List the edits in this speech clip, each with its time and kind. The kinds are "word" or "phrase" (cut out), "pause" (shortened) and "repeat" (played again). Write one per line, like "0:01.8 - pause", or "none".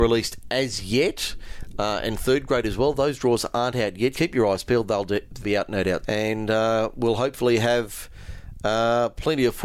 0:04.1 - word
0:05.4 - word
0:06.0 - word